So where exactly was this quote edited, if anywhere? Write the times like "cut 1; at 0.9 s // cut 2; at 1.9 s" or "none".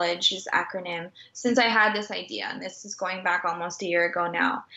none